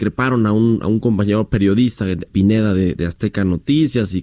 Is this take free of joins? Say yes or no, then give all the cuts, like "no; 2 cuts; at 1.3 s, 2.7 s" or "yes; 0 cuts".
no; 2 cuts; at 2.3 s, 2.9 s